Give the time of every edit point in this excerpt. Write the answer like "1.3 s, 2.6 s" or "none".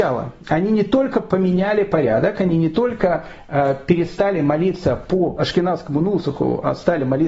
none